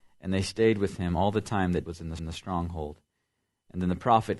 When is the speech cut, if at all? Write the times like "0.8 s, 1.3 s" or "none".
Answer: 1.9 s, 2.2 s

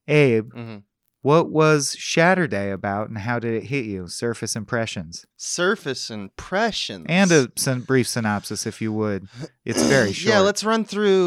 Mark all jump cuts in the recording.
5.3 s

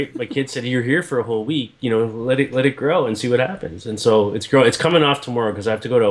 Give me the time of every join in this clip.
none

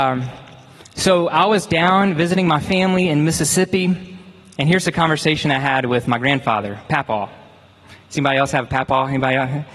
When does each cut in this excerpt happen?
none

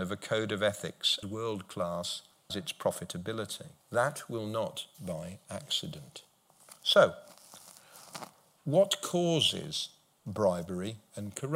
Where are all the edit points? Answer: 1.2 s, 2.5 s, 3.8 s, 5.0 s, 6.8 s

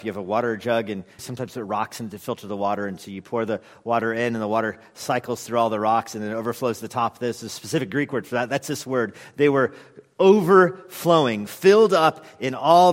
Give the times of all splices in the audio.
1.2 s

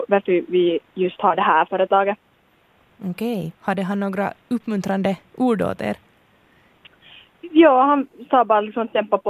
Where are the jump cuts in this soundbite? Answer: 3.5 s

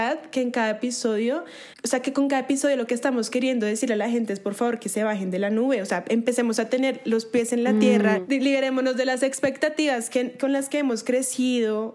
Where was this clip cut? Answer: 1.7 s

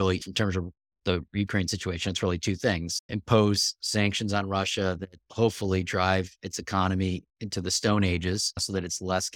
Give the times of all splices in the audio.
3.0 s

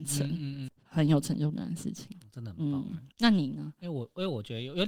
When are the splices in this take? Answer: 3.1 s

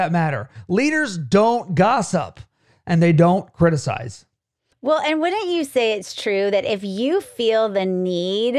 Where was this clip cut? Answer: none

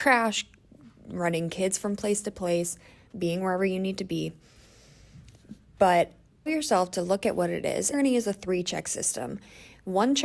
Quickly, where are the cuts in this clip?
6.5 s, 7.9 s

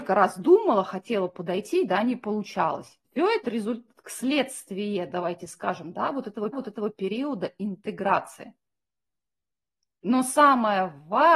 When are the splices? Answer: 3.0 s, 3.4 s, 6.5 s

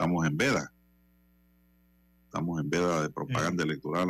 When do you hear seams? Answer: none

